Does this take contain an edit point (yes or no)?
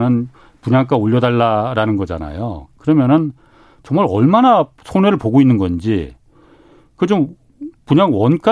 no